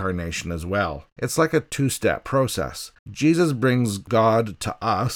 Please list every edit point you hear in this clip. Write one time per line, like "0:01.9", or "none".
0:01.1
0:03.0